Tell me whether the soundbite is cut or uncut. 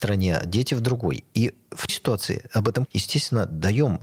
cut